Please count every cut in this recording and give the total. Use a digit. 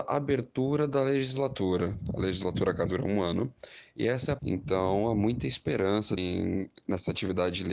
3